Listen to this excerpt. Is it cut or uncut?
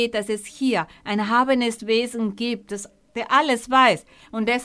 uncut